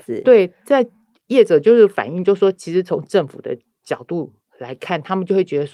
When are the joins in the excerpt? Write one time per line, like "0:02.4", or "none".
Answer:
none